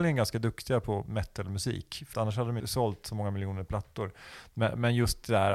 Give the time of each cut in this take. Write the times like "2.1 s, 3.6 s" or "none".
1.1 s, 2.1 s, 2.6 s